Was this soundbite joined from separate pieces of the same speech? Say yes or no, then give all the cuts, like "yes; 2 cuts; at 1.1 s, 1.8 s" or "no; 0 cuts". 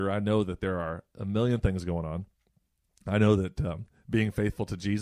no; 0 cuts